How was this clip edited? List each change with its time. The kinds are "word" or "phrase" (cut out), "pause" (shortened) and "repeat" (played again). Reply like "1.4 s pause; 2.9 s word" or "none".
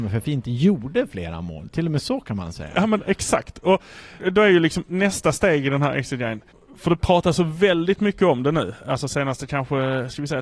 4.2 s word; 6.5 s pause